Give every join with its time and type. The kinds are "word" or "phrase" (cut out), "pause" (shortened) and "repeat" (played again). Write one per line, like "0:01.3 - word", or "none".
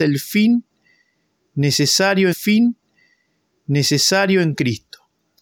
0:02.3 - repeat